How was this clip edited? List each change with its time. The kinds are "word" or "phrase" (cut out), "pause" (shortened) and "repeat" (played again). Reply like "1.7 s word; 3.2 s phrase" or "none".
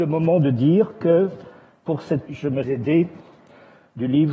2.3 s word; 2.6 s word